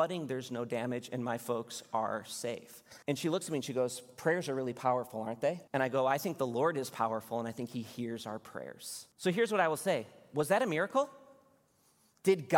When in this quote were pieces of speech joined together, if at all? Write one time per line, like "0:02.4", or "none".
0:03.0
0:05.7
0:09.1